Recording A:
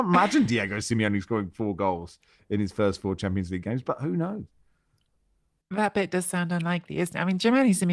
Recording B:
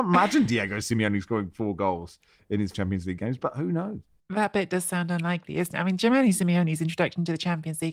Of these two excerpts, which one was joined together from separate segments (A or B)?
B